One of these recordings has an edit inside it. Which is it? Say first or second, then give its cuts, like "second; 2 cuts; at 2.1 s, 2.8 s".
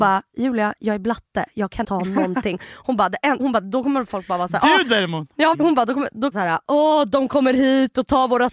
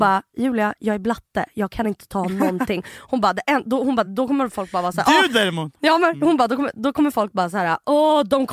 first; 4 cuts; at 1.8 s, 3.4 s, 5.5 s, 6.3 s